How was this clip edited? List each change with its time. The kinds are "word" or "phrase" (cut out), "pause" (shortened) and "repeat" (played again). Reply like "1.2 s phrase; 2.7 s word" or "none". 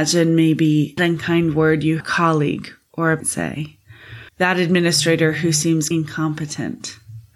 1.0 s word; 2.0 s phrase; 3.2 s word; 4.3 s pause; 5.9 s word